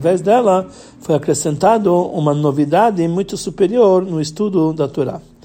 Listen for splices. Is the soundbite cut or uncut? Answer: uncut